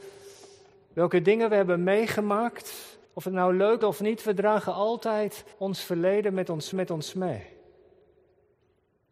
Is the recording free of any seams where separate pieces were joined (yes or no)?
no